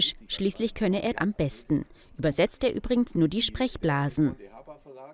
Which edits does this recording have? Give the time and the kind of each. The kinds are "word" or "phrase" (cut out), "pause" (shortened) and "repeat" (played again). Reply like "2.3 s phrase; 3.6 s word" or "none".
1.1 s word; 2.6 s word; 3.1 s word